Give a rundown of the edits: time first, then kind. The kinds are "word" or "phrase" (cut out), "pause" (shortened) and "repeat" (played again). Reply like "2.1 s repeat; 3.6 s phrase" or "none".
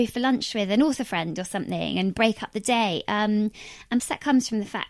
4.0 s word